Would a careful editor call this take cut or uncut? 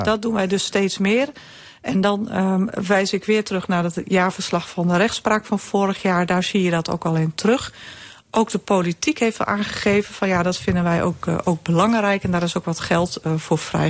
uncut